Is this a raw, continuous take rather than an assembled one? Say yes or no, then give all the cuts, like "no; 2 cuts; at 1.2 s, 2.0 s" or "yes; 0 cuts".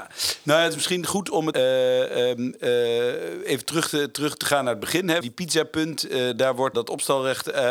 no; 3 cuts; at 1.5 s, 5.2 s, 6.7 s